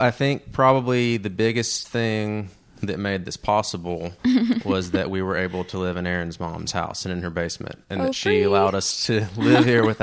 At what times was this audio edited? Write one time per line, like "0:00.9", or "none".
0:04.2